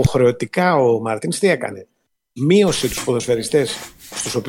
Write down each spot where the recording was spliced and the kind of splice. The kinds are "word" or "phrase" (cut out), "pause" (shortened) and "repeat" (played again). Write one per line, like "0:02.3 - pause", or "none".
none